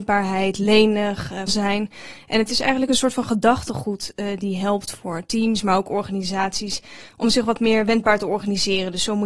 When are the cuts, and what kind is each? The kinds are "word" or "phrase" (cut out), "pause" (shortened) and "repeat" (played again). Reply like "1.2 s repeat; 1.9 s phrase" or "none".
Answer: 1.5 s word